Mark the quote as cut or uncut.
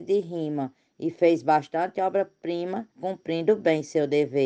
cut